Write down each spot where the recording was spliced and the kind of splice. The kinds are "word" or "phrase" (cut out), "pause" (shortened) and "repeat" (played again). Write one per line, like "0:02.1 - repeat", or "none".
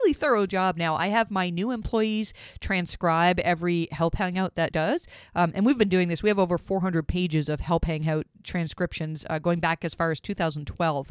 0:04.7 - phrase